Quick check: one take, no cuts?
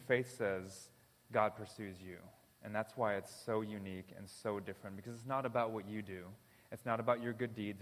yes; 0 cuts

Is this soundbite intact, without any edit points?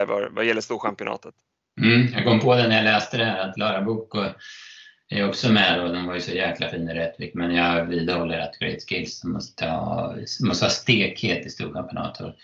yes; 0 cuts

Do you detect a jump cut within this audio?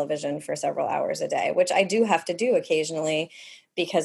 no; 0 cuts

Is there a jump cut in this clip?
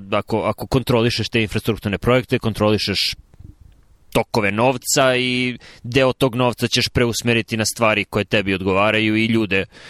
no; 0 cuts

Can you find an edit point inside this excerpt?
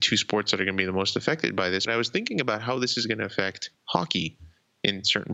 yes; 2 cuts; at 1.9 s, 3.7 s

